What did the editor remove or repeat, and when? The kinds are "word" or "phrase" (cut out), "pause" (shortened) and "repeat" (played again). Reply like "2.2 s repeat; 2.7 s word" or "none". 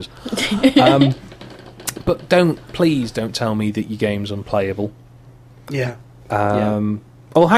none